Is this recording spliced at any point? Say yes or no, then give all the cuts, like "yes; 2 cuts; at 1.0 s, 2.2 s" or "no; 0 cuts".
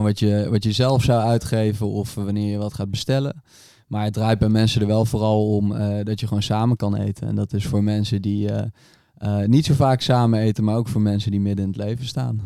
no; 0 cuts